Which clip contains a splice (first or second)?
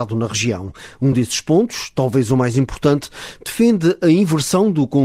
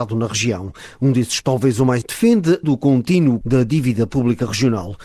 second